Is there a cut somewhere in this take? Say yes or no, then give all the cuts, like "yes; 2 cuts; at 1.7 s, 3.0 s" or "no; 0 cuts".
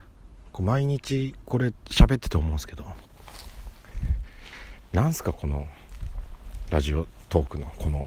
yes; 1 cut; at 1.7 s